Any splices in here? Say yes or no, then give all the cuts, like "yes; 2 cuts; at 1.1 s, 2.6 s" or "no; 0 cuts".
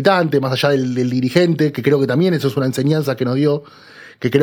no; 0 cuts